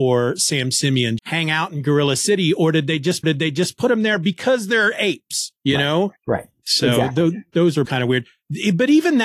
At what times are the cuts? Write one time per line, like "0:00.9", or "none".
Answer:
0:01.2
0:03.2
0:05.6
0:06.2
0:07.8

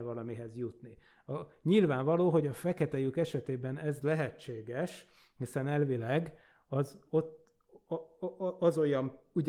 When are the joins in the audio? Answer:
none

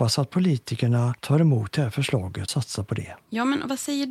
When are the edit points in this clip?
0:02.5

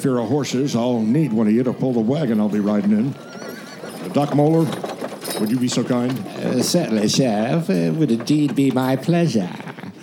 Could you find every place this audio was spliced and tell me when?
none

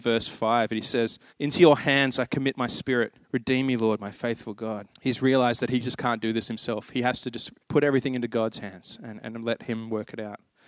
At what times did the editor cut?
0:01.3
0:03.2
0:04.9
0:07.6

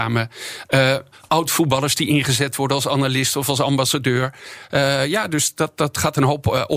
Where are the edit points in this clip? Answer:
none

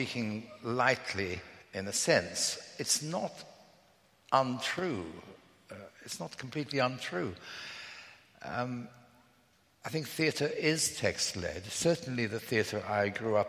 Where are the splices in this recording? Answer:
0:01.6

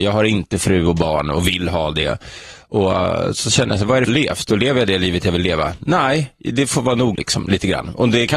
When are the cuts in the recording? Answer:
0:04.1
0:07.1

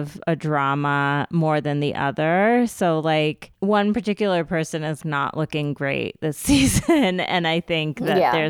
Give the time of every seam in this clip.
0:03.5
0:05.0

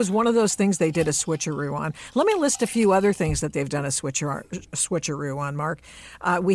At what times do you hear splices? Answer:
none

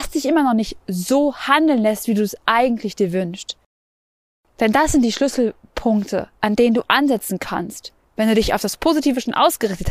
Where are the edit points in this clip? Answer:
0:06.4
0:08.0

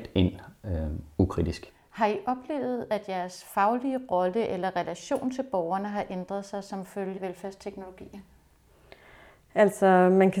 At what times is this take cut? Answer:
0:07.2

